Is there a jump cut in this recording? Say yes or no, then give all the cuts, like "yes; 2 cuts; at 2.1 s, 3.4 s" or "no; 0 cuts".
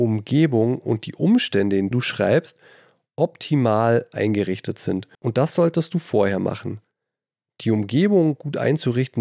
yes; 2 cuts; at 1.9 s, 5.1 s